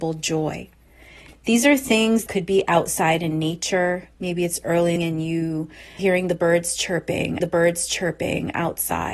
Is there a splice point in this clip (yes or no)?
yes